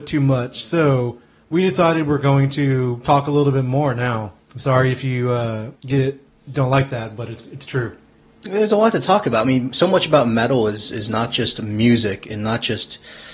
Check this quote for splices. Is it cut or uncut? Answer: cut